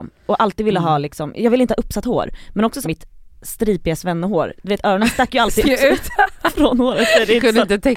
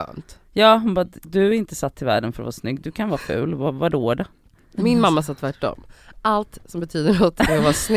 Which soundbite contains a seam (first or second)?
first